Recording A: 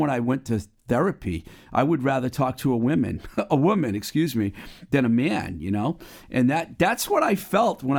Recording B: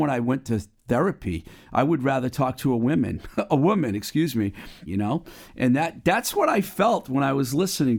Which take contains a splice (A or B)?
B